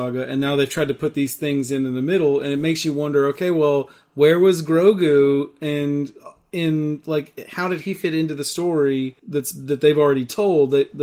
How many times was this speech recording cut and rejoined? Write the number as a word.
one